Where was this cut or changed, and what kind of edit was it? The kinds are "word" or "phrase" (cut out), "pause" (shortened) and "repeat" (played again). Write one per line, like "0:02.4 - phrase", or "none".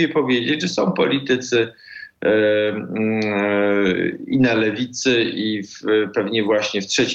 none

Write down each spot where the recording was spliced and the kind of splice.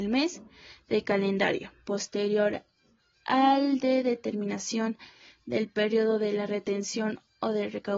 0:01.9 - word

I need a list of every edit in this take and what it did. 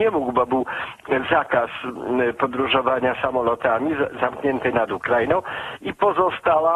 0:04.7 - phrase

